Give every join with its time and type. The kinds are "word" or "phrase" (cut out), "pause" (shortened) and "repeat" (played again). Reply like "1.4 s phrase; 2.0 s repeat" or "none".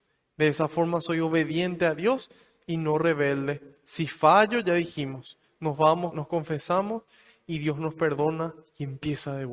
6.1 s word